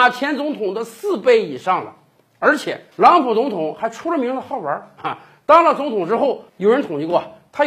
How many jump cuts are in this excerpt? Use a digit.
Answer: 2